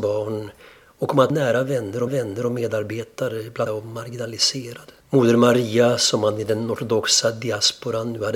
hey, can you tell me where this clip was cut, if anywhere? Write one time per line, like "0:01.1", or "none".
0:01.3
0:02.1
0:03.7
0:05.0